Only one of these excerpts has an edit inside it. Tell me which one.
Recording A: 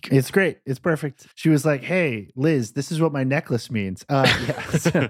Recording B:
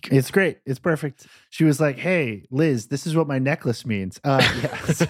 A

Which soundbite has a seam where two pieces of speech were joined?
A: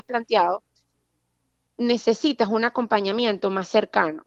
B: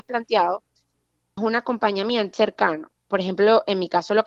B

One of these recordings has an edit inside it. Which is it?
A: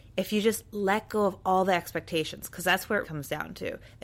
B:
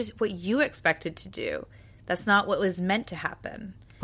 A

